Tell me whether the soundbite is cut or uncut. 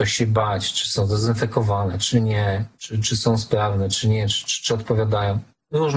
uncut